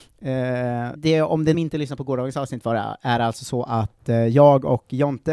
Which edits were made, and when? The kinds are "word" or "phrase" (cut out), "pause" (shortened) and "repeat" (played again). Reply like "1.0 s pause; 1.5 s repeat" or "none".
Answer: 1.0 s word; 1.5 s phrase